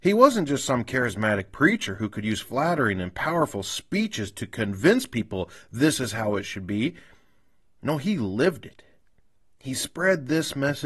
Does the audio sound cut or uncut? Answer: uncut